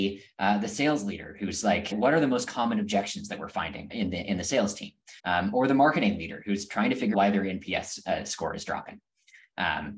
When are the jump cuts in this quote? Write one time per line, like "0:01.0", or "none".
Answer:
0:01.9
0:03.9
0:05.2
0:07.1